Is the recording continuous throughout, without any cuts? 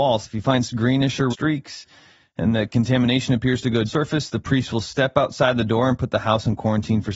no; 2 cuts; at 1.3 s, 3.9 s

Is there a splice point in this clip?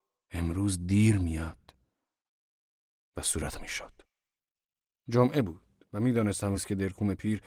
yes; 2 cuts; at 3.6 s, 6.6 s

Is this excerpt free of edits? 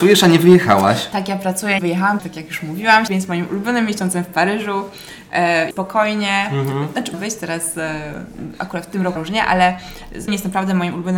no; 7 cuts; at 1.8 s, 2.2 s, 3.1 s, 5.7 s, 7.1 s, 9.2 s, 10.3 s

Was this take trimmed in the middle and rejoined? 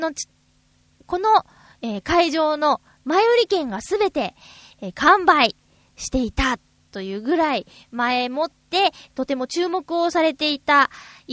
no; 0 cuts

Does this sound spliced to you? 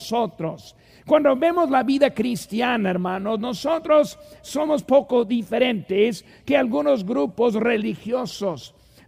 no; 0 cuts

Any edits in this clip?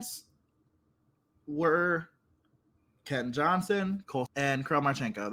yes; 1 cut; at 4.3 s

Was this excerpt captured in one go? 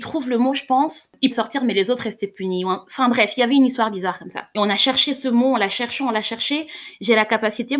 no; 1 cut; at 1.3 s

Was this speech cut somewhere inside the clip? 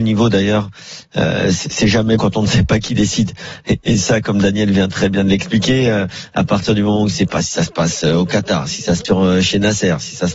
yes; 2 cuts; at 2.2 s, 9.0 s

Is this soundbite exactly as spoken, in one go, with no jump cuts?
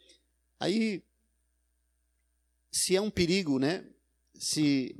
yes; 0 cuts

